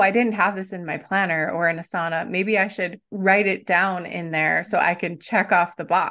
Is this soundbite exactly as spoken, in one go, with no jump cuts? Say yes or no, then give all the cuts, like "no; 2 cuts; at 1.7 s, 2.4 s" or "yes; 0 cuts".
no; 1 cut; at 3.0 s